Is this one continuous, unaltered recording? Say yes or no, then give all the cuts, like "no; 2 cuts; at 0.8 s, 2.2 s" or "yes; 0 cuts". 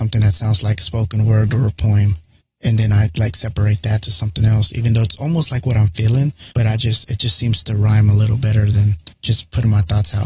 no; 3 cuts; at 2.4 s, 6.5 s, 9.1 s